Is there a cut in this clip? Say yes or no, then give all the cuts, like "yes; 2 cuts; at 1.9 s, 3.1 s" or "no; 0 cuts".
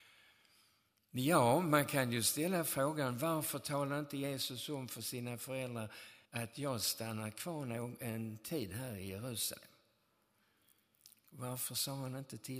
yes; 1 cut; at 6.2 s